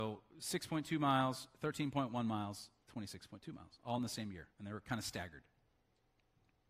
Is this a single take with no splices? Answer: no; 1 cut; at 4.5 s

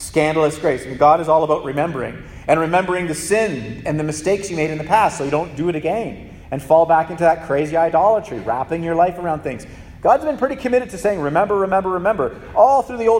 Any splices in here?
no; 0 cuts

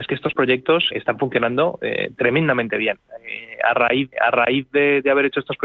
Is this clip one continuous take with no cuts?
no; 2 cuts; at 0.9 s, 4.1 s

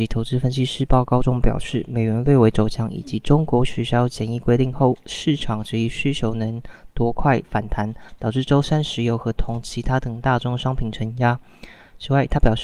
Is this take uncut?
yes; 0 cuts

